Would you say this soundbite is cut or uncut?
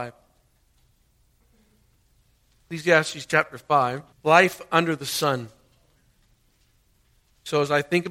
cut